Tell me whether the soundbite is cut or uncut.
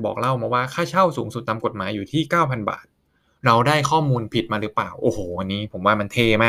uncut